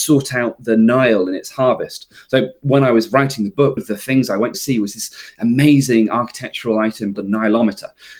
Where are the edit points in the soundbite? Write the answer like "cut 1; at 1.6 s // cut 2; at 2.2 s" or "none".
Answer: cut 1; at 3.8 s // cut 2; at 4.5 s // cut 3; at 7.1 s